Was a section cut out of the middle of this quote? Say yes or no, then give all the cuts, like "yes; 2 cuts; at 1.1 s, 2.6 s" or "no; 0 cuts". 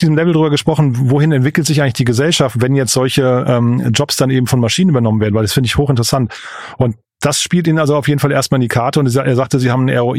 no; 0 cuts